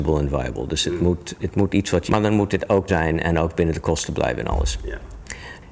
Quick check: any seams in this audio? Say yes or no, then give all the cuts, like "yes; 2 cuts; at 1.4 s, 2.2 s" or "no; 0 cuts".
yes; 2 cuts; at 2.1 s, 2.9 s